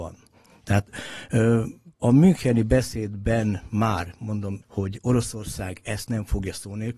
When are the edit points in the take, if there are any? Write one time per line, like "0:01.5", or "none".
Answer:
0:02.0
0:04.6